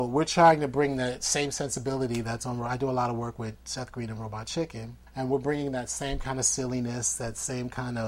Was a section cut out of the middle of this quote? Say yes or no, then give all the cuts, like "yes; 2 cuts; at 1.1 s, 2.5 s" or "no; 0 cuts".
yes; 1 cut; at 5.1 s